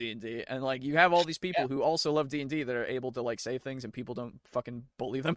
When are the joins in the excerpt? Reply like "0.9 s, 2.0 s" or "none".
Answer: none